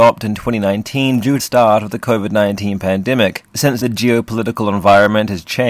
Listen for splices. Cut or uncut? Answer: cut